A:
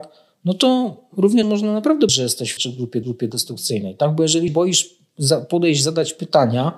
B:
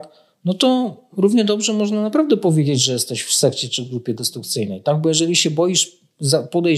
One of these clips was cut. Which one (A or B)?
A